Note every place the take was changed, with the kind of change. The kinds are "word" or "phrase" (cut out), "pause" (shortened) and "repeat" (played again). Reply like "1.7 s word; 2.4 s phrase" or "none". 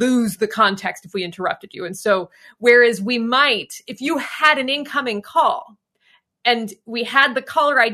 none

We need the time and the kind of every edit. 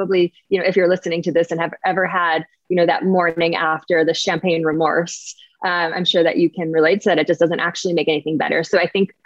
none

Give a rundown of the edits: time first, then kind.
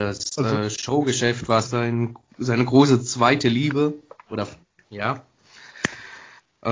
1.6 s word

